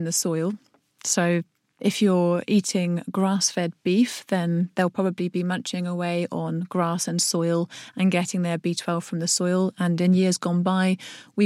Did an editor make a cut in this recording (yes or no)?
no